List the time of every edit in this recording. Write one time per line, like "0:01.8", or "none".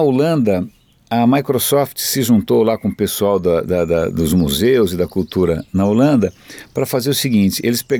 none